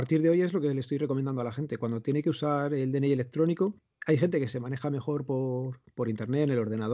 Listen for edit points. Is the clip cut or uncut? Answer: uncut